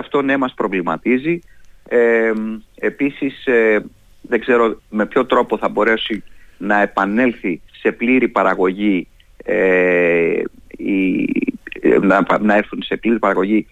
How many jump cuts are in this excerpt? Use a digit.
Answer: 3